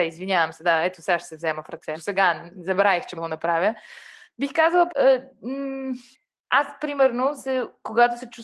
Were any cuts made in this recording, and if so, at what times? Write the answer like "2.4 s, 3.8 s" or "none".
1.9 s, 3.1 s, 4.9 s, 6.1 s